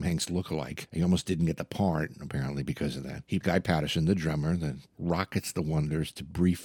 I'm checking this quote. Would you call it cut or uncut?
cut